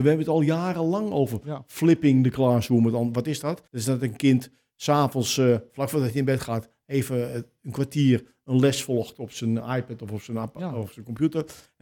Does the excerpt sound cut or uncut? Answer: cut